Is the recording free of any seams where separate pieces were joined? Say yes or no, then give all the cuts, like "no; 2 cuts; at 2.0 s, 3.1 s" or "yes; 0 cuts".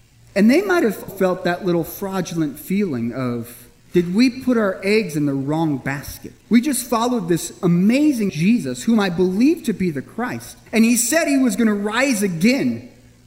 no; 5 cuts; at 1.1 s, 3.8 s, 6.4 s, 8.3 s, 10.7 s